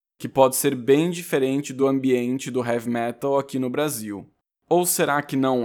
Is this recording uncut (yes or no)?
yes